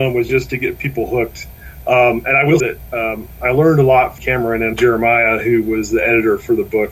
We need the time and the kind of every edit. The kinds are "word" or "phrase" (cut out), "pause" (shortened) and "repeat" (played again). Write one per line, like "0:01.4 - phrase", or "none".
0:02.6 - word
0:04.2 - word
0:04.7 - word